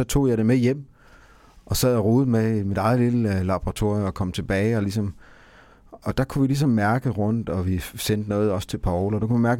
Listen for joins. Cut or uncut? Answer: uncut